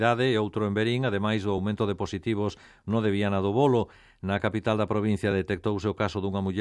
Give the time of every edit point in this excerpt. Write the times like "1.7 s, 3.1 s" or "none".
none

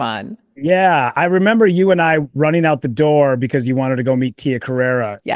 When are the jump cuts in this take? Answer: none

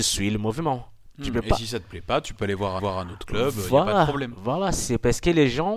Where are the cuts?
2.8 s

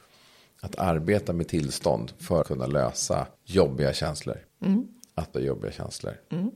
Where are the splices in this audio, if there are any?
2.4 s, 3.3 s, 4.5 s, 5.3 s

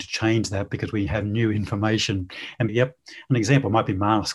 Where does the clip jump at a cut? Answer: 2.7 s

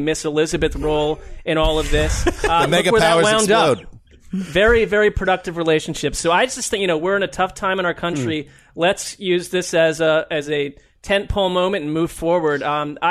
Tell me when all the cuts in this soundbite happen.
none

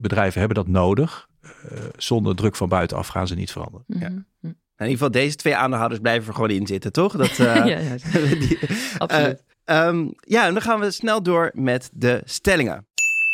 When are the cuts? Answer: none

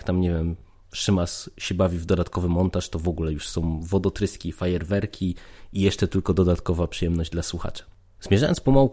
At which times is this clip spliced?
none

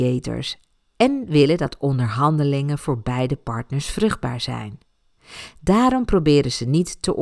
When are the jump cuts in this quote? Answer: none

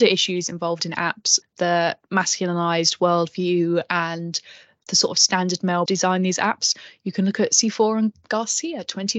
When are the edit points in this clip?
1.4 s, 5.9 s

